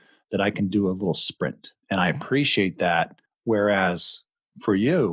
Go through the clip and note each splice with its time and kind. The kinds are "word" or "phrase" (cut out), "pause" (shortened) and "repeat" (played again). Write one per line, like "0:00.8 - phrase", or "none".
0:01.8 - pause
0:03.3 - pause

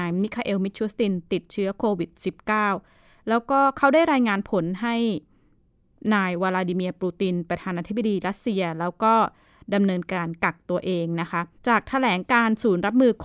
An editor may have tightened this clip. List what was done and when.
0:11.6 - pause

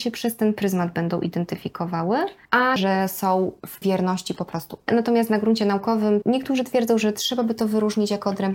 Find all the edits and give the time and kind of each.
0:02.8 - word
0:03.8 - word
0:06.2 - word

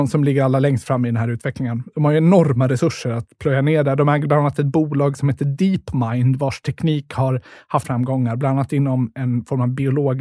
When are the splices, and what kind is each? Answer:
0:07.8 - word

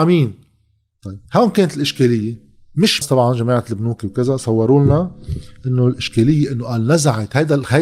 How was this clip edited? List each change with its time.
0:01.3 - pause
0:03.0 - phrase

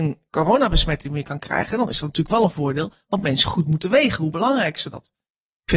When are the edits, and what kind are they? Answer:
none

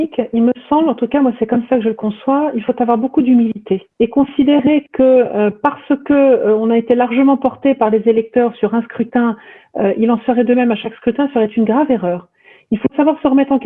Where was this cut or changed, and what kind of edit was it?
0:03.9 - pause

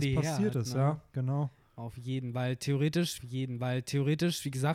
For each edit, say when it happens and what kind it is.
0:03.2 - repeat

